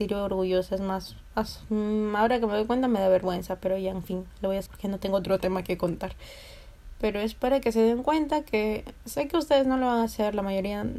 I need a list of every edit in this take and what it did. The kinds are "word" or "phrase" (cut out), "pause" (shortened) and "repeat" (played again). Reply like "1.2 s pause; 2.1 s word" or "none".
4.7 s word; 9.0 s word